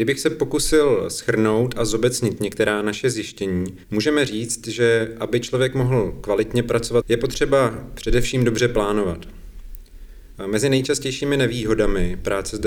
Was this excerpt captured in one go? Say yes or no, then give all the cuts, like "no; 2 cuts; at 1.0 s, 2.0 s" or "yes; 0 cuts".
no; 2 cuts; at 3.8 s, 7.0 s